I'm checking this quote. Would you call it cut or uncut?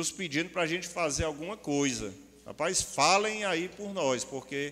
uncut